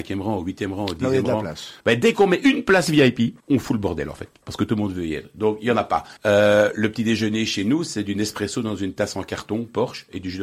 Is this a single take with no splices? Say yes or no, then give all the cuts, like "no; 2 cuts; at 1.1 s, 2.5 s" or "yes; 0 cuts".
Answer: no; 3 cuts; at 1.8 s, 3.4 s, 6.2 s